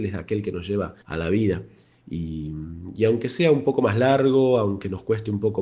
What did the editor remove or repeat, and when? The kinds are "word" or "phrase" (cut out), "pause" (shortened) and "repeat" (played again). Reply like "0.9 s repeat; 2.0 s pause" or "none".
1.0 s pause